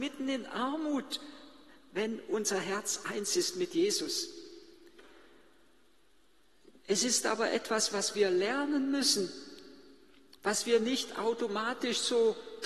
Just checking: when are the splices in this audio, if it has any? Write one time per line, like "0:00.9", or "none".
none